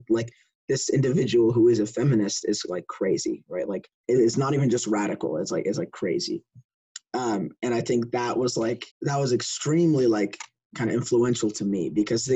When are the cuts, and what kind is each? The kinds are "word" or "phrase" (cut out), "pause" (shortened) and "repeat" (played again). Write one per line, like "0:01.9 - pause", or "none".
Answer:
0:04.0 - pause
0:08.9 - pause

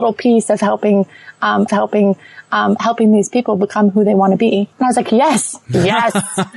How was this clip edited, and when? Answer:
0:01.7 - repeat
0:04.7 - pause

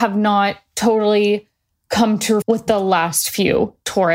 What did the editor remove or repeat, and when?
0:02.4 - word

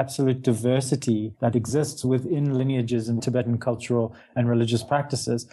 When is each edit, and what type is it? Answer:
0:03.2 - word

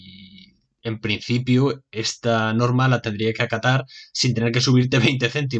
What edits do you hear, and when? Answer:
none

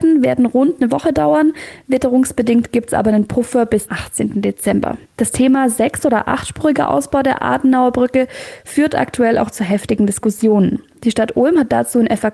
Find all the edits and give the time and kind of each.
0:03.9 - word
0:05.1 - pause

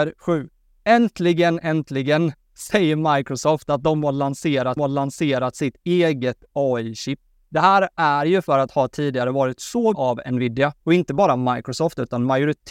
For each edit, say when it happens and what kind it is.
0:01.6 - word
0:04.8 - repeat
0:08.7 - word
0:09.9 - word
0:10.8 - pause

